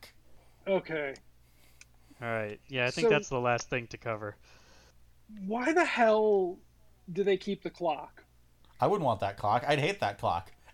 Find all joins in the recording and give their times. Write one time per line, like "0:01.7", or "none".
none